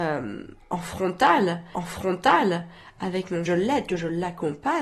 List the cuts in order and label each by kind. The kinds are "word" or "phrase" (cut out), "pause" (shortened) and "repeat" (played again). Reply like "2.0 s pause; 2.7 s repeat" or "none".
1.7 s repeat; 3.5 s phrase